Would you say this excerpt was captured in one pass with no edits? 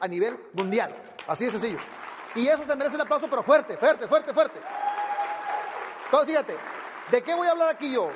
yes; 0 cuts

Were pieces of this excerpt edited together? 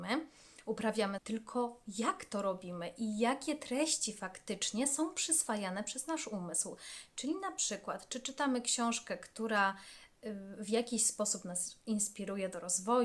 yes; 1 cut; at 1.2 s

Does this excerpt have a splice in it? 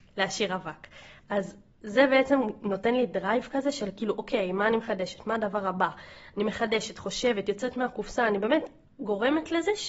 yes; 1 cut; at 8.9 s

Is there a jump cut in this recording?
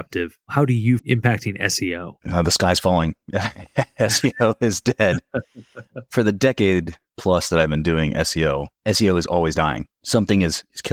yes; 2 cuts; at 1.0 s, 2.2 s

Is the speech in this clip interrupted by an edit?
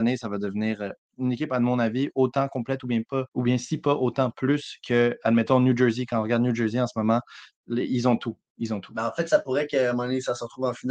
yes; 1 cut; at 3.3 s

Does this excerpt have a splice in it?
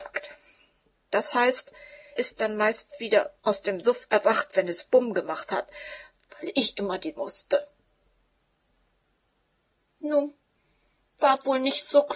yes; 3 cuts; at 2.2 s, 3.4 s, 7.2 s

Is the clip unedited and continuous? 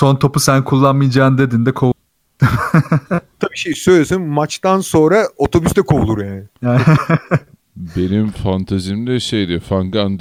yes; 0 cuts

